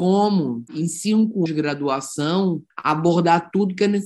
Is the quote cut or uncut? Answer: cut